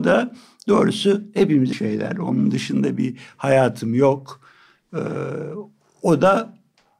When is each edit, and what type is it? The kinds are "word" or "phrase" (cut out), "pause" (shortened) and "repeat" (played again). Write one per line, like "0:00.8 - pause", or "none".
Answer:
0:01.7 - word